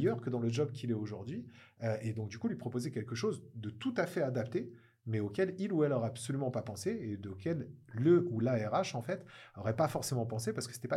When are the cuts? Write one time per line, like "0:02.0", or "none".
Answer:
none